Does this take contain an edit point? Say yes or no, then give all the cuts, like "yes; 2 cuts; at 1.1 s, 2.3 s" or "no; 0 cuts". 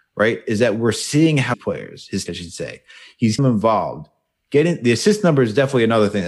yes; 3 cuts; at 1.5 s, 2.3 s, 3.4 s